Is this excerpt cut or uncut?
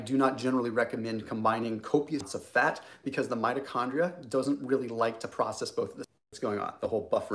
cut